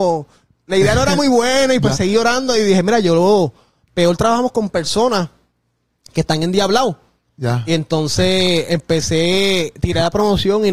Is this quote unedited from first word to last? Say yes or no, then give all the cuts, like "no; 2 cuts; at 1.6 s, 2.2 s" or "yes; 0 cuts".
yes; 0 cuts